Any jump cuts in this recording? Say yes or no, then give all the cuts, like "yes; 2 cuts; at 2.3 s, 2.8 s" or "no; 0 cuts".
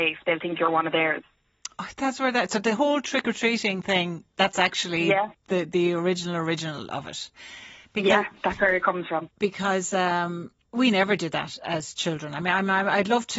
yes; 2 cuts; at 9.3 s, 10.6 s